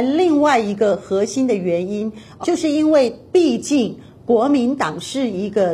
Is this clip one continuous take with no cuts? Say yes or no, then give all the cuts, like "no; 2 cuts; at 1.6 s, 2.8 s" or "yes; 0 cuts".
no; 1 cut; at 2.4 s